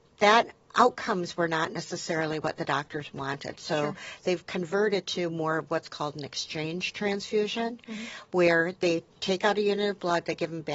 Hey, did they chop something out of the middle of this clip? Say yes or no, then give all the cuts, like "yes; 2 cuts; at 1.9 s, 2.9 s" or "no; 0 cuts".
no; 0 cuts